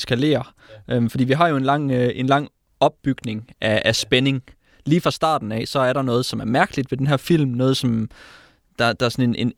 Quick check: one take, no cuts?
yes; 0 cuts

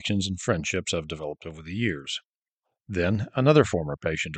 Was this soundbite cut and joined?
no; 0 cuts

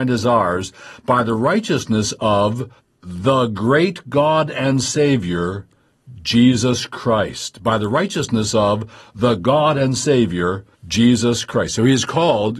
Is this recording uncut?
no; 2 cuts; at 2.8 s, 10.7 s

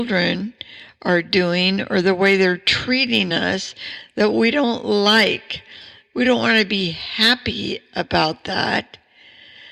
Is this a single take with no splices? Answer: yes; 0 cuts

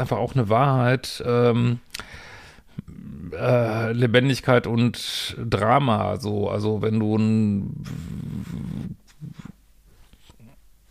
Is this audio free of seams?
yes; 0 cuts

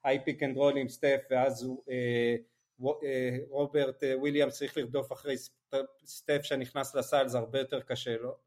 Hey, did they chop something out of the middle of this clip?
no; 0 cuts

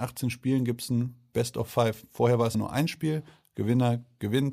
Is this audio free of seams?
no; 1 cut; at 2.5 s

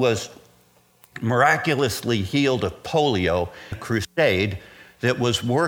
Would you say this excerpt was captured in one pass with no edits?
no; 1 cut; at 3.7 s

